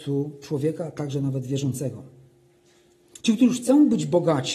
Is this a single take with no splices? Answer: no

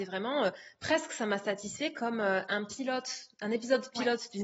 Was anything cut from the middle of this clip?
no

